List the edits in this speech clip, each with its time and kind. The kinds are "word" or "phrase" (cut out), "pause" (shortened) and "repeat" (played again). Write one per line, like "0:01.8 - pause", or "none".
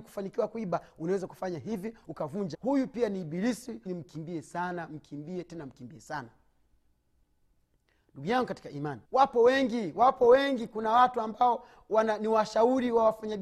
0:02.0 - phrase
0:02.5 - word
0:03.9 - phrase
0:09.0 - pause